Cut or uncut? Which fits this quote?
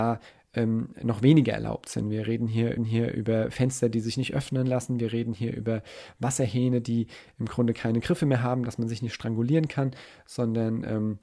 cut